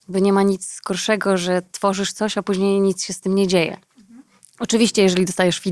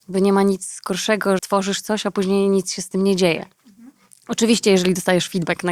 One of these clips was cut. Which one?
second; 1 cut; at 1.4 s

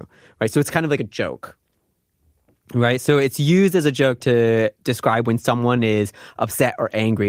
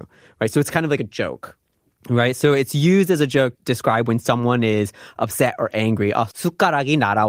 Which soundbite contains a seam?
second; 2 cuts; at 1.9 s, 3.5 s

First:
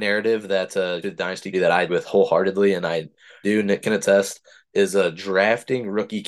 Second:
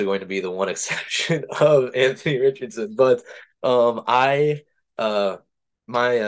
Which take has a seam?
first; 4 cuts; at 1.0 s, 1.5 s, 1.9 s, 3.4 s

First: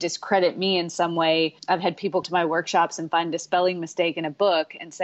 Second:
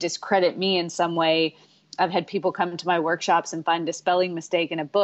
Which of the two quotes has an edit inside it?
first; 2 cuts; at 1.6 s, 2.2 s

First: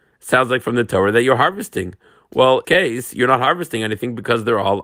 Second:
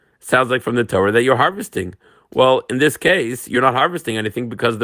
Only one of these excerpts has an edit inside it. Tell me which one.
first; 1 cut; at 2.6 s

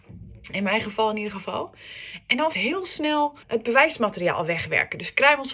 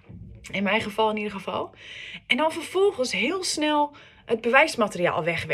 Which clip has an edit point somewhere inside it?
first; 2 cuts; at 2.5 s, 3.4 s

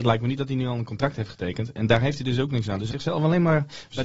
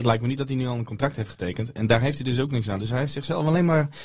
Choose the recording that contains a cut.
first; 1 cut; at 2.9 s

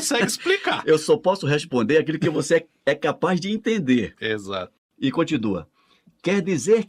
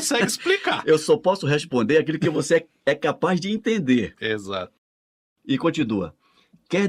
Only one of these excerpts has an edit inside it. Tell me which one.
first; 1 cut; at 4.9 s

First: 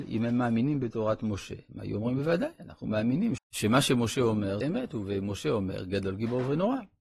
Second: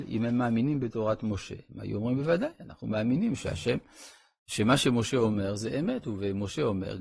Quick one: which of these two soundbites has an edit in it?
first; 2 cuts; at 3.4 s, 4.6 s

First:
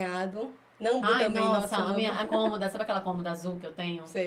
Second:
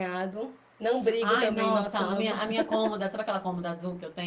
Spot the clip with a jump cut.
first; 2 cuts; at 1.0 s, 2.3 s

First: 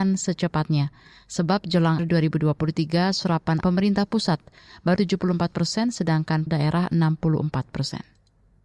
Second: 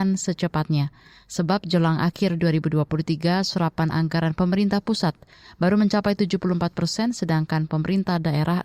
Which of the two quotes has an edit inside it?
first; 4 cuts; at 2.0 s, 3.6 s, 5.0 s, 6.5 s

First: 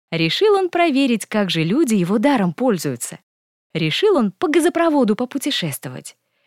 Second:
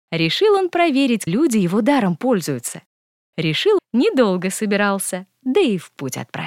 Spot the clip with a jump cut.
second; 2 cuts; at 1.3 s, 3.8 s

